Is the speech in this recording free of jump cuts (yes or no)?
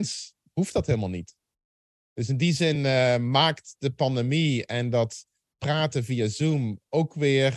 yes